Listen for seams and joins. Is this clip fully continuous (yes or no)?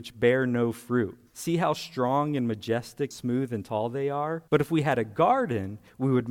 no